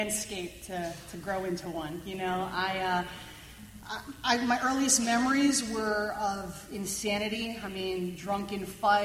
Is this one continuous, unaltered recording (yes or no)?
yes